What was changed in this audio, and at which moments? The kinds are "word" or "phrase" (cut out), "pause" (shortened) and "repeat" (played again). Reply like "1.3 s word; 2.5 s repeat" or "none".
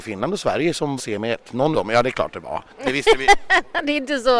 1.0 s word; 1.7 s word